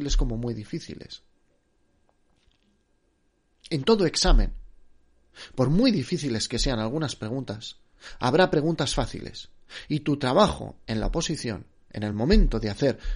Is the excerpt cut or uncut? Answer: uncut